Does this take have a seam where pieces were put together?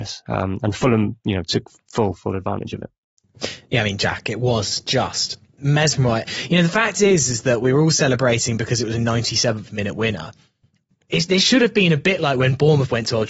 no; 0 cuts

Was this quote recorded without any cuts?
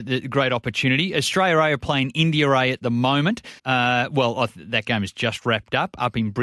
no; 1 cut; at 3.6 s

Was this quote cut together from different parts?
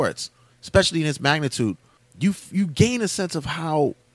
no; 0 cuts

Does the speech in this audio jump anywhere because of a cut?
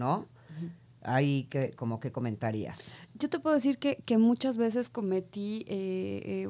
no; 0 cuts

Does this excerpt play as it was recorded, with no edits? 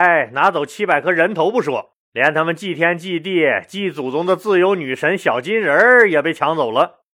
no; 1 cut; at 2.0 s

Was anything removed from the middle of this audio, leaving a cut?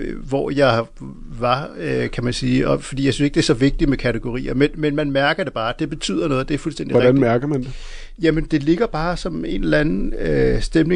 no; 0 cuts

